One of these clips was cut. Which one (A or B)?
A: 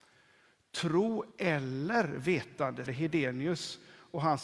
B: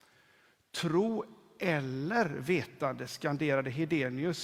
A